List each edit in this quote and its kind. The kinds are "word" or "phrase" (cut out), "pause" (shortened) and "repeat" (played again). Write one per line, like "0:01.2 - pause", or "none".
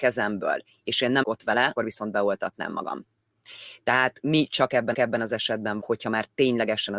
0:01.2 - word
0:01.8 - word
0:04.9 - repeat
0:05.8 - phrase